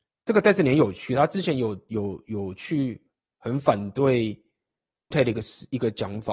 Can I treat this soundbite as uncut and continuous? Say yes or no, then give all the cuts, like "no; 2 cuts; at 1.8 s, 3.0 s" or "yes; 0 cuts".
no; 1 cut; at 5.1 s